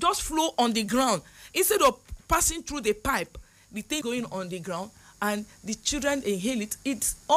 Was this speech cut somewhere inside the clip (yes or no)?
yes